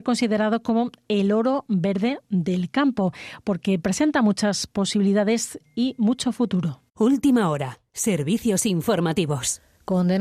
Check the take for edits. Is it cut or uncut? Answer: cut